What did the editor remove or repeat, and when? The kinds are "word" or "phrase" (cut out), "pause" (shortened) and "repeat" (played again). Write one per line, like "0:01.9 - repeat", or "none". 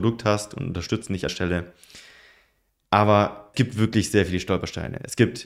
0:01.3 - word
0:03.5 - word